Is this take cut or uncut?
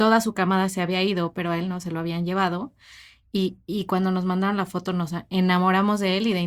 uncut